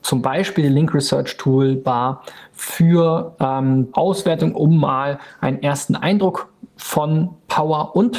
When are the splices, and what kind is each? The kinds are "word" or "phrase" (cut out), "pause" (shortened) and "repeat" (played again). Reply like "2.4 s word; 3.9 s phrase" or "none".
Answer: 3.9 s word